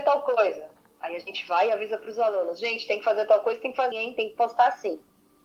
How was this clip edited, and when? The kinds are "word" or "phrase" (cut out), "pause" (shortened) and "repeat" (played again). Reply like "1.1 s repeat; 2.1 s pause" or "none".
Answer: 3.9 s word